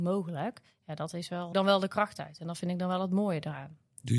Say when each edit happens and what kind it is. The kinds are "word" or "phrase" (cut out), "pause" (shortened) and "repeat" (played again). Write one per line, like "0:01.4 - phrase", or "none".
0:01.5 - phrase